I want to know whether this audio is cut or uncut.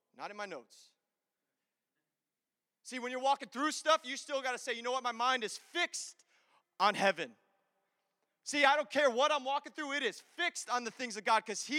uncut